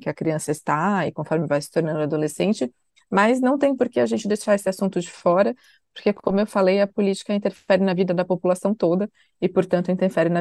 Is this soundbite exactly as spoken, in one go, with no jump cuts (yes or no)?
yes